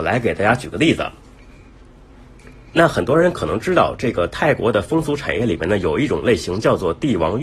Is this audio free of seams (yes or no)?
yes